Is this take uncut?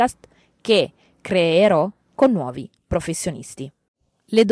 yes; 0 cuts

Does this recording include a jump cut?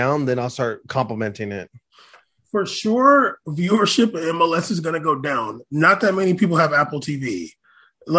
no; 0 cuts

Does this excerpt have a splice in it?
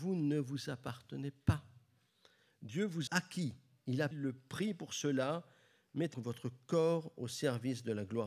yes; 3 cuts; at 3.1 s, 4.1 s, 6.1 s

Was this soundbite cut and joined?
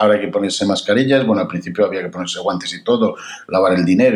no; 0 cuts

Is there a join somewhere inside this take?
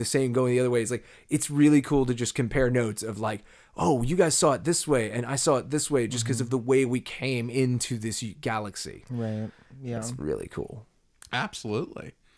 no; 0 cuts

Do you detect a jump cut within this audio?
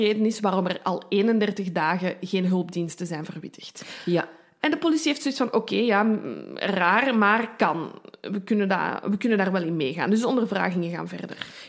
no; 0 cuts

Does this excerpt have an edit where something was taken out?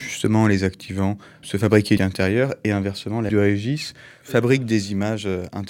yes; 3 cuts; at 1.4 s, 2.0 s, 3.3 s

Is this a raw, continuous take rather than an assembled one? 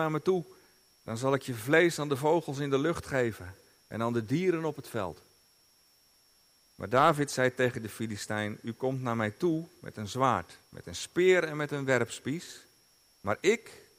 yes; 0 cuts

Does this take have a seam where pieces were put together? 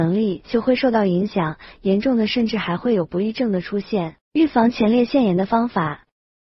yes; 1 cut; at 4.2 s

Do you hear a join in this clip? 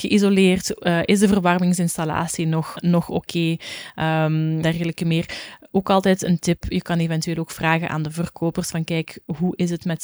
yes; 2 cuts; at 2.8 s, 4.6 s

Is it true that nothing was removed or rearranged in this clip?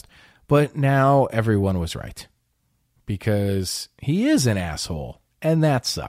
yes; 0 cuts

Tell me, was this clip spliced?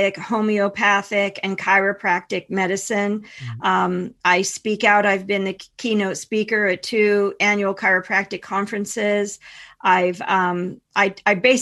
no; 0 cuts

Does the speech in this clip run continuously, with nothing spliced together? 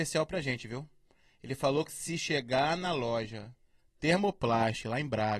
yes; 0 cuts

